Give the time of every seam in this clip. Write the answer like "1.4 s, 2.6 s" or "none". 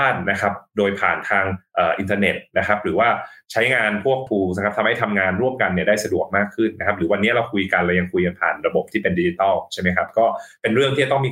4.3 s

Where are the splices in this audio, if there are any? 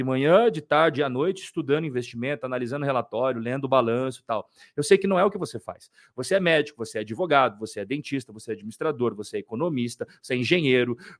none

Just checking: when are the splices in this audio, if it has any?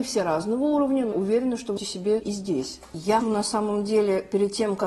1.1 s, 1.8 s, 2.2 s, 3.2 s

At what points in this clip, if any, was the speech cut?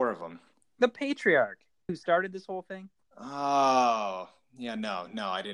1.9 s

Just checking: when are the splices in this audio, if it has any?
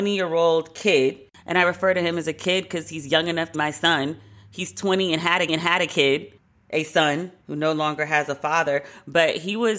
3.5 s, 5.5 s, 7.4 s

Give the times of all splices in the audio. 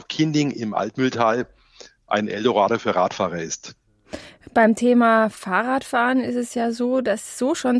none

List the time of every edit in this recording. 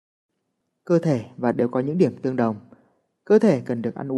1.5 s

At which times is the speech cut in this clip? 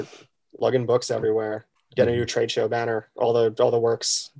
1.8 s

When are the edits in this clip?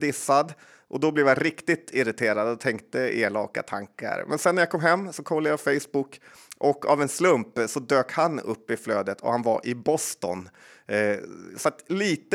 none

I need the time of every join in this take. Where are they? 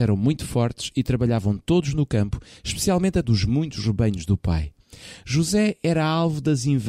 3.2 s

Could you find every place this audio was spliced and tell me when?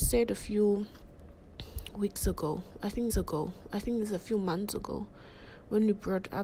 3.1 s

